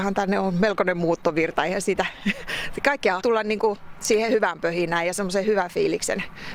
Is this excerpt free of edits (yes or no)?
no